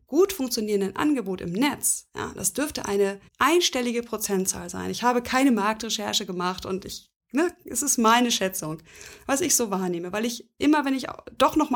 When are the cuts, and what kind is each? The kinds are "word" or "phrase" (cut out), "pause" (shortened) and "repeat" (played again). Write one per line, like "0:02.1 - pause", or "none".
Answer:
0:03.3 - pause